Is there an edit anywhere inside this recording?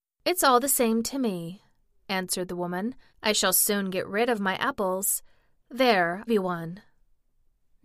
yes; 2 cuts; at 3.1 s, 6.3 s

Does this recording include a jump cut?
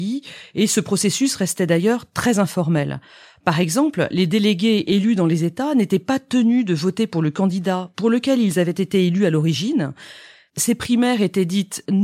no; 0 cuts

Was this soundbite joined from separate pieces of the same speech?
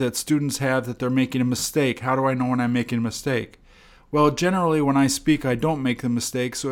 no; 0 cuts

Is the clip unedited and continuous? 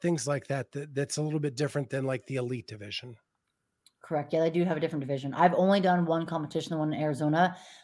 yes; 0 cuts

